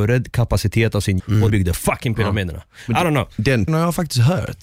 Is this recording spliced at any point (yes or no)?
yes